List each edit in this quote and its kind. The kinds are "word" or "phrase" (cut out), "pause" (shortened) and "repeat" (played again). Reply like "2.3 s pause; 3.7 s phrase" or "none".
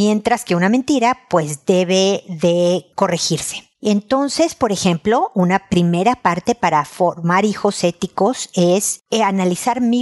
none